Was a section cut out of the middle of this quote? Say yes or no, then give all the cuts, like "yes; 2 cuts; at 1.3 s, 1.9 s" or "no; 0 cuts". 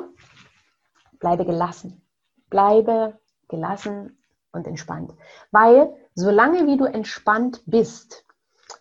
no; 0 cuts